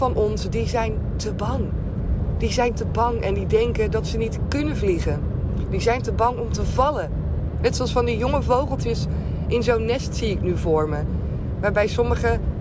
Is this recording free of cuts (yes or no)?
yes